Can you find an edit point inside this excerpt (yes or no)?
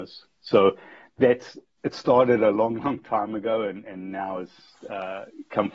no